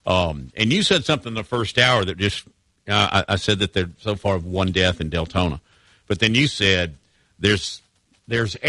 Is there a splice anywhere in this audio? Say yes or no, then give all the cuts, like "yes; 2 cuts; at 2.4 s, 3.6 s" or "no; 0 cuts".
no; 0 cuts